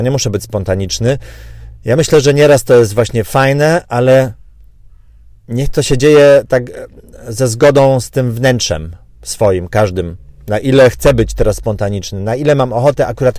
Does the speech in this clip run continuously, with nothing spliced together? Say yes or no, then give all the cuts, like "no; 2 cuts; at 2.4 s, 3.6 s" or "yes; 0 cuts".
yes; 0 cuts